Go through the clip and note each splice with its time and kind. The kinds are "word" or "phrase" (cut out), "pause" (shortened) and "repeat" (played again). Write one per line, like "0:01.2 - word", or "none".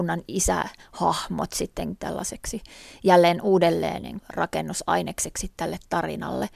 0:02.0 - word
0:04.2 - word